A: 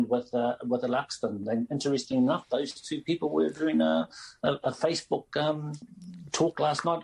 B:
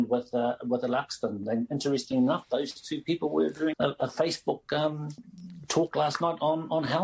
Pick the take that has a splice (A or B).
B